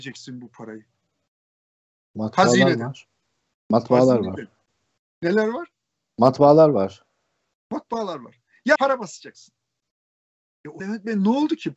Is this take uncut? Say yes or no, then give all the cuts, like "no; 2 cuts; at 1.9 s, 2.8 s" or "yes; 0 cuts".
no; 2 cuts; at 8.8 s, 10.8 s